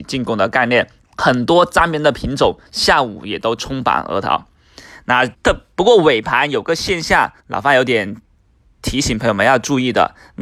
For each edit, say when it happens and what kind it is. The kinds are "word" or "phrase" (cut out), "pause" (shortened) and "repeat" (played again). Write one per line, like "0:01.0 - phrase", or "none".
0:01.0 - pause
0:02.7 - pause
0:05.3 - pause
0:07.4 - pause